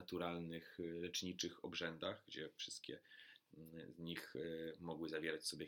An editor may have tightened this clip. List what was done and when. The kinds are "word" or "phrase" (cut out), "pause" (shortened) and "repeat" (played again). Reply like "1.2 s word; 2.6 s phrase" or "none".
none